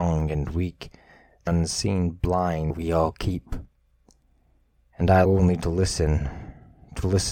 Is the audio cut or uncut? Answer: cut